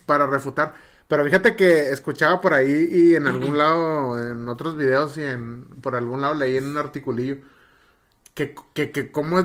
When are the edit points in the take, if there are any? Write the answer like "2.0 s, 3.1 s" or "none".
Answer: none